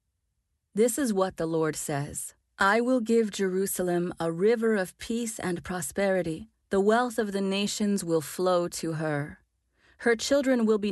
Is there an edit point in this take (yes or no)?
yes